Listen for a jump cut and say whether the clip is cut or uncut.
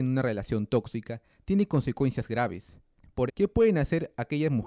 cut